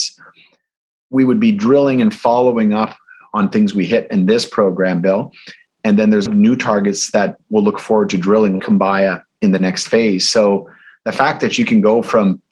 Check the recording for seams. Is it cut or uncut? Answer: cut